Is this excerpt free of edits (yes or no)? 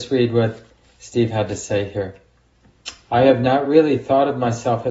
yes